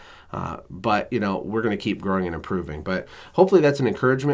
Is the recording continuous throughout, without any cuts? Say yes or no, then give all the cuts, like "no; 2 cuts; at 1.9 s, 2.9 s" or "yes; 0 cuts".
yes; 0 cuts